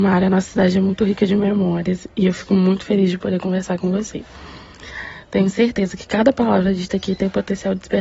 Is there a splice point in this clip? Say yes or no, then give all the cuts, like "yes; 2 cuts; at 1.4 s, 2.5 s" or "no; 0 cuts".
no; 0 cuts